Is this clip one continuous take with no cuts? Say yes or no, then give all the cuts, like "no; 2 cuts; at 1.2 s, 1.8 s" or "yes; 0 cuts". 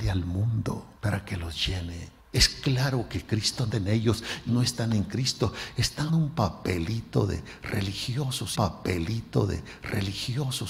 no; 6 cuts; at 1.0 s, 2.2 s, 3.7 s, 4.5 s, 6.1 s, 8.5 s